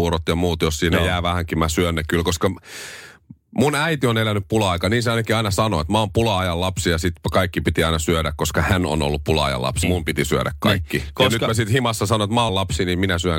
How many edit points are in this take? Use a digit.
2